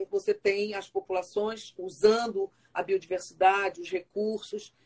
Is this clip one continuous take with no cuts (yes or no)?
yes